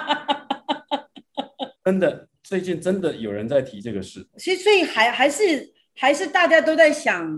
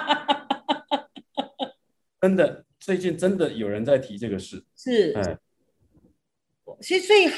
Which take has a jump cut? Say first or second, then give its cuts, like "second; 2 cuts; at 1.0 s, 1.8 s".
first; 2 cuts; at 1.8 s, 4.3 s